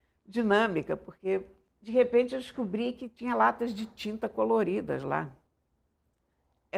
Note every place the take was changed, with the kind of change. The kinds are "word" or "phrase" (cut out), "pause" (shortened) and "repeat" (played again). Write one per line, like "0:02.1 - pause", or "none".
0:01.7 - pause